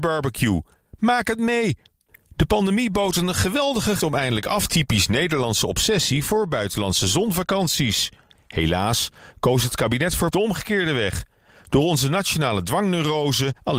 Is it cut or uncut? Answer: cut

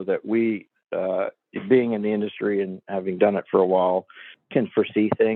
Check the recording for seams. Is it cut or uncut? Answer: uncut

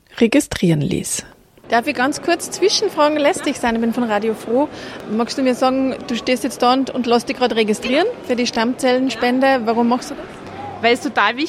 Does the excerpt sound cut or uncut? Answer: uncut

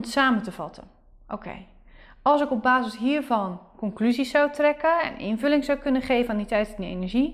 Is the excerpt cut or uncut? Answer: uncut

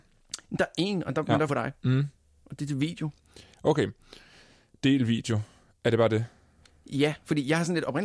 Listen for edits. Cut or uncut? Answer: cut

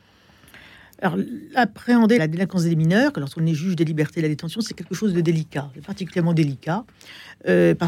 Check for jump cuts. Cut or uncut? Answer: cut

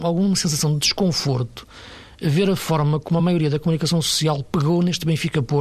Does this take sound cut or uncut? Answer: uncut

